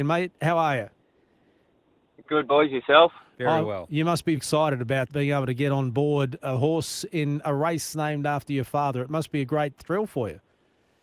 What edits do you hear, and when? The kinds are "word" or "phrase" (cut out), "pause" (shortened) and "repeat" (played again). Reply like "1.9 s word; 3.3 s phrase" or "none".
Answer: 4.4 s word; 5.1 s word

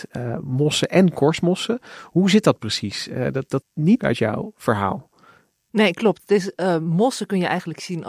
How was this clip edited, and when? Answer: 3.6 s word; 4.0 s phrase

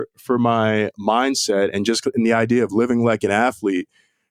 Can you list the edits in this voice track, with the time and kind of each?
none

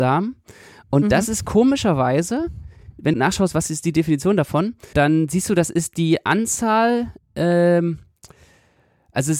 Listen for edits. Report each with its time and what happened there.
3.1 s word; 4.9 s word

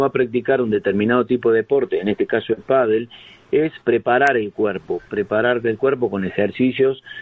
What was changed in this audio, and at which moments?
3.8 s word

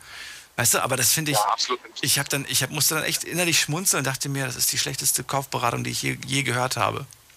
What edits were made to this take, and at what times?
none

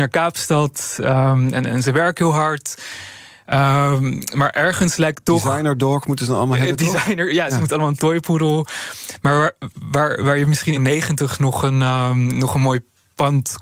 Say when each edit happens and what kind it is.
10.8 s phrase

